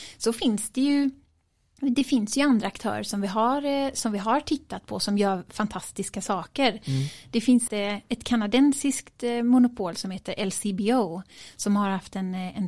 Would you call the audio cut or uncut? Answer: cut